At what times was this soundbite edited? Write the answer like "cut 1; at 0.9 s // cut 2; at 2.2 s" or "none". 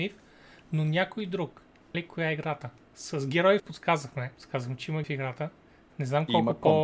cut 1; at 1.9 s // cut 2; at 3.6 s // cut 3; at 4.3 s // cut 4; at 5.0 s